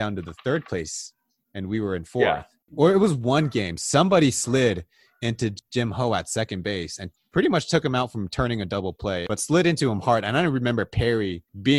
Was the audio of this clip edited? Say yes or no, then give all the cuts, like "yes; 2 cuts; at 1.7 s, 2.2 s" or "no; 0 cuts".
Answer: no; 0 cuts